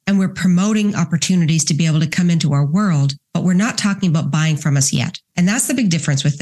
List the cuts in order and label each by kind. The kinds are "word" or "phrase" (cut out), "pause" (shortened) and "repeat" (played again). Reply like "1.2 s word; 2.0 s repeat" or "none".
3.2 s pause; 5.3 s pause